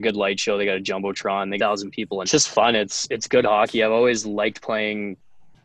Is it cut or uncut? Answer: cut